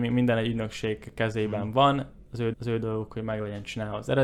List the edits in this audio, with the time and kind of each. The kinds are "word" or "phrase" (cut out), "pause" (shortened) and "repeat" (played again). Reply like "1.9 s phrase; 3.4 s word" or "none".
2.5 s repeat